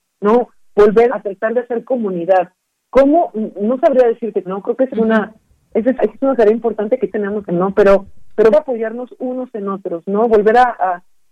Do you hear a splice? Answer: yes; 7 cuts; at 1.1 s, 4.5 s, 4.9 s, 6.0 s, 7.1 s, 7.5 s, 8.5 s

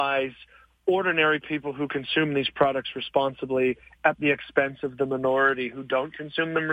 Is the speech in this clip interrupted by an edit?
no; 0 cuts

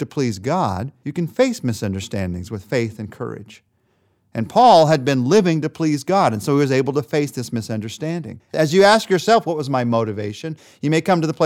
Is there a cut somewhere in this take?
no; 0 cuts

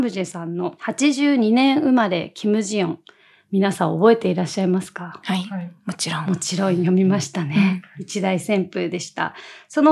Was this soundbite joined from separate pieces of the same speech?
no; 0 cuts

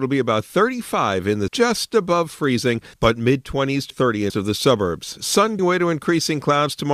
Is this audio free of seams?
no; 5 cuts; at 1.5 s, 2.9 s, 3.9 s, 4.3 s, 5.6 s

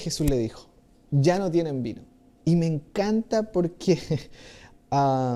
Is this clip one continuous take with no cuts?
yes; 0 cuts

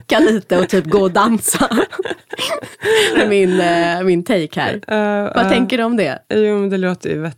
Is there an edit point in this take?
yes; 2 cuts; at 3.1 s, 6.2 s

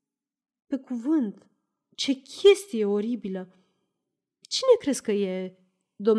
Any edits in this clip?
no; 0 cuts

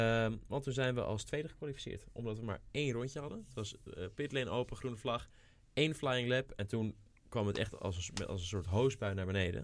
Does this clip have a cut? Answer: no; 0 cuts

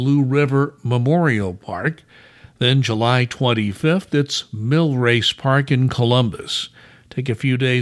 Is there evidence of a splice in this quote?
no; 0 cuts

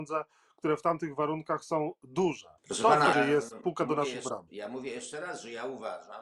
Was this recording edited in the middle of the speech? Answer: yes; 2 cuts; at 2.6 s, 3.1 s

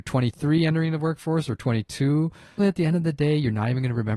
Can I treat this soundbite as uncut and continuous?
no; 1 cut; at 2.6 s

